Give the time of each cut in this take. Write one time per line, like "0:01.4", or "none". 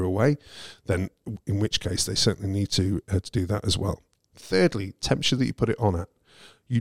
none